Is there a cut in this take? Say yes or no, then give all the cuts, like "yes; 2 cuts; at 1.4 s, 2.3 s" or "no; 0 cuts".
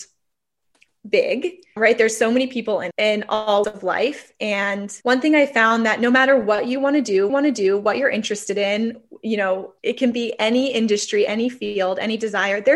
yes; 6 cuts; at 1.8 s, 2.9 s, 3.6 s, 5.0 s, 7.3 s, 9.8 s